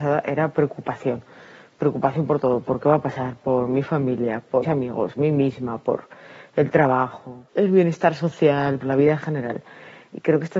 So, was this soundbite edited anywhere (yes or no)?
yes